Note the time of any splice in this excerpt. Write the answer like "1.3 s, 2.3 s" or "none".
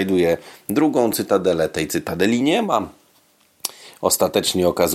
none

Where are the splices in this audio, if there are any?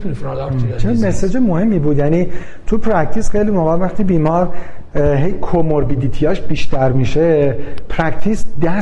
none

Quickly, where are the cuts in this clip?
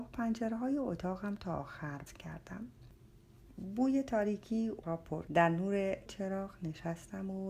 1.4 s, 2.1 s, 4.8 s, 5.3 s, 6.1 s

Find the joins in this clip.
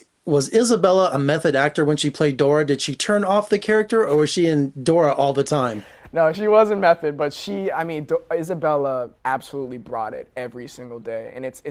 6.3 s, 9.2 s

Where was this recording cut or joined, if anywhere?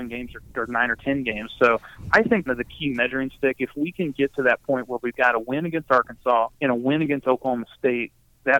2.5 s, 6.5 s

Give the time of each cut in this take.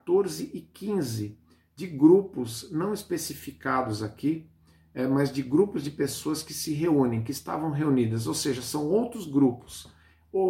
none

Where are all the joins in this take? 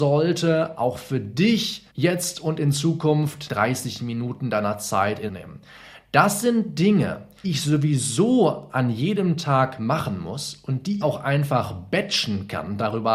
1.9 s, 3.5 s, 5.3 s, 7.4 s, 11.0 s

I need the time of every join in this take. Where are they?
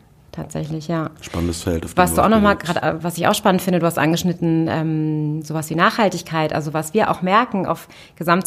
none

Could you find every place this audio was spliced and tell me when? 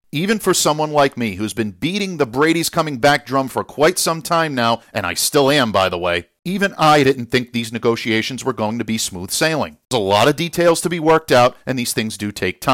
none

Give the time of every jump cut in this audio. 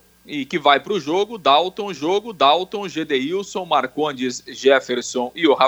1.9 s

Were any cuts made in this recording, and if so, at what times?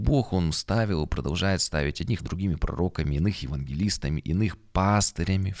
2.2 s

